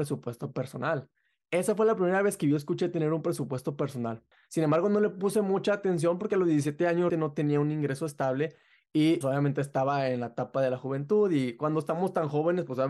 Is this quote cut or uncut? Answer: cut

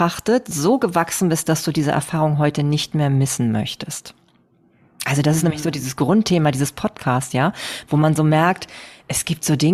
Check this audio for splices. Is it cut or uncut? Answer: uncut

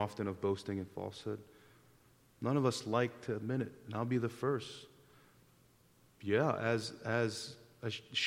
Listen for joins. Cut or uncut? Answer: uncut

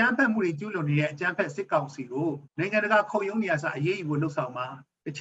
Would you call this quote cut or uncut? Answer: cut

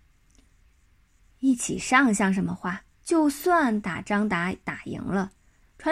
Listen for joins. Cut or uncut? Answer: cut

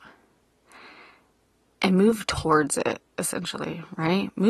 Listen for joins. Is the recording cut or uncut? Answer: uncut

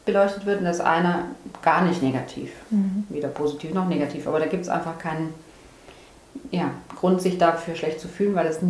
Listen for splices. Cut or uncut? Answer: uncut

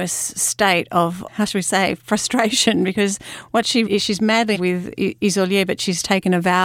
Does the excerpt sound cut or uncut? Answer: cut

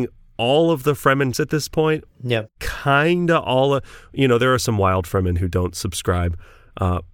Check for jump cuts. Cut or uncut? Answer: cut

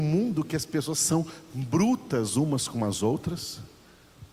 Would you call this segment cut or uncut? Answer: uncut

